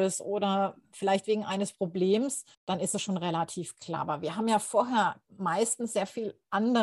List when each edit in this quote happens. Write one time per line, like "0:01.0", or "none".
0:02.5
0:05.3